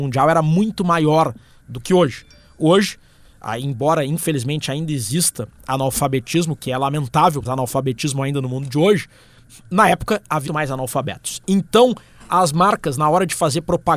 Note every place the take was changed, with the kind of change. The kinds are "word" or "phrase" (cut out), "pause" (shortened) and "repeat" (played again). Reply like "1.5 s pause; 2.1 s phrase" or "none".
7.4 s word; 10.5 s word